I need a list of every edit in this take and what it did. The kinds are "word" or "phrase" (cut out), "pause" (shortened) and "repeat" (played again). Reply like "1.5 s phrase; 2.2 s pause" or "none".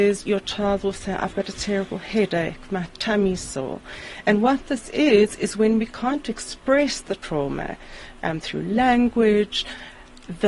none